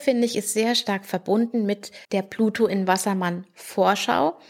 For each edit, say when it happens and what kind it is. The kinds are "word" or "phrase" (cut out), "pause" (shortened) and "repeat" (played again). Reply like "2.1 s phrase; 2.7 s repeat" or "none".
2.0 s pause